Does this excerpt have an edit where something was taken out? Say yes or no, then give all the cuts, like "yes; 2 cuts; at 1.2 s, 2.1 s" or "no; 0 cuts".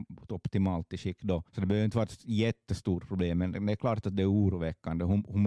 yes; 1 cut; at 1.5 s